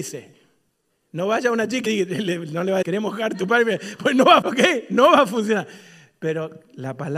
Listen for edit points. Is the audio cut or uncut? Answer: cut